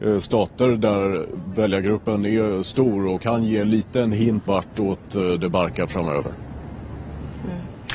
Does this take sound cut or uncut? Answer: cut